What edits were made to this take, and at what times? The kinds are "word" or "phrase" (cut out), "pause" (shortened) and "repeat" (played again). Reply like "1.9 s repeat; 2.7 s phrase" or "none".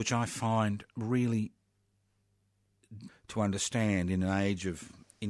3.1 s word